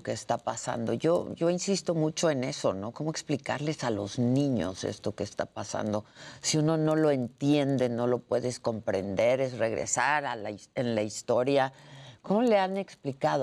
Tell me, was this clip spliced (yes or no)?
no